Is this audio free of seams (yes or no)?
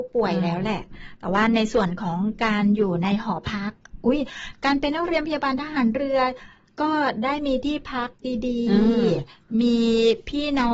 yes